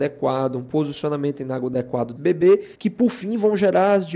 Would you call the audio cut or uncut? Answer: cut